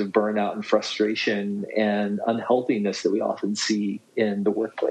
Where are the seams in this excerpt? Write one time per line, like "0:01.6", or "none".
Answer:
none